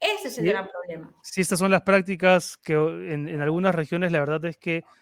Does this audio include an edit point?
no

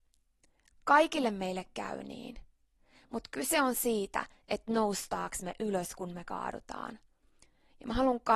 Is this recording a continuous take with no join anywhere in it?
yes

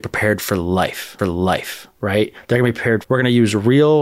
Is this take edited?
yes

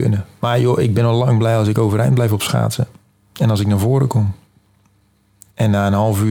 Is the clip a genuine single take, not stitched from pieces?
yes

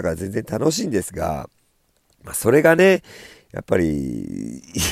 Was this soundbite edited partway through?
no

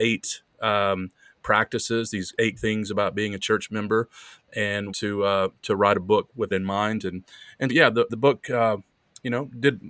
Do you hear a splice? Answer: yes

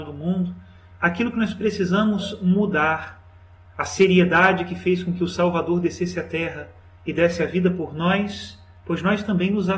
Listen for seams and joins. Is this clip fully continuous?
yes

